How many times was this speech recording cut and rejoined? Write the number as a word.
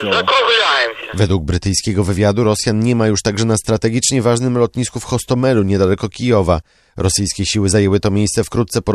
zero